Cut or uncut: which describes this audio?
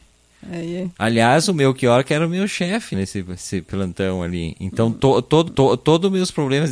cut